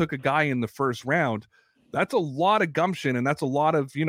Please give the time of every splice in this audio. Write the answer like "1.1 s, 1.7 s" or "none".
none